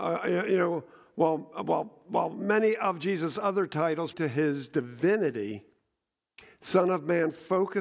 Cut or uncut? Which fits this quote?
cut